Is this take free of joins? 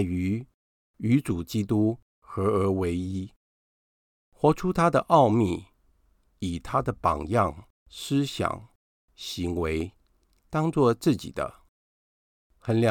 no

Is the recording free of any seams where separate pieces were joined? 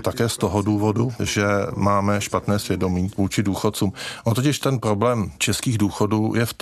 yes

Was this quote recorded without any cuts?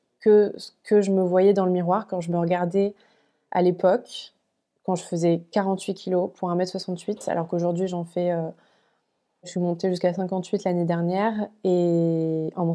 yes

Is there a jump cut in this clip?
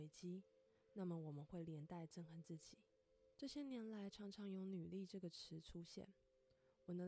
yes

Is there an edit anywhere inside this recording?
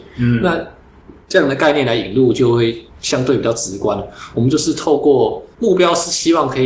yes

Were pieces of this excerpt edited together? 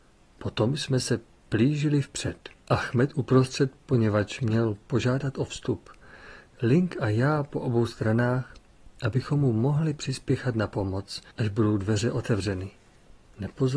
yes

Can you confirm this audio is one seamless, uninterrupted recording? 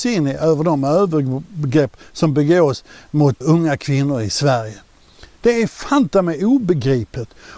no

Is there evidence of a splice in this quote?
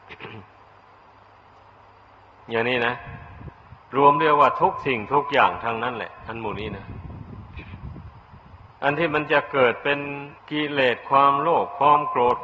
yes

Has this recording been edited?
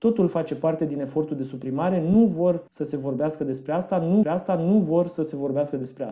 yes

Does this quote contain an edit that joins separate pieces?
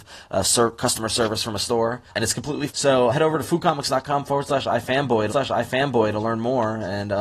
yes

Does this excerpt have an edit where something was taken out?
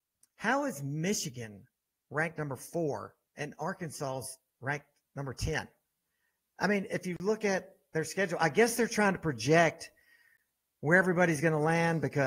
no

